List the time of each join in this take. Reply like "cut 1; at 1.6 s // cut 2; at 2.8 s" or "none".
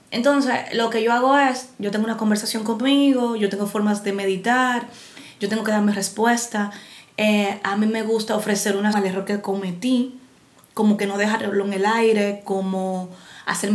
cut 1; at 8.9 s